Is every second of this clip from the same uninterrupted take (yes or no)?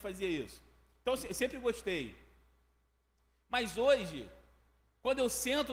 yes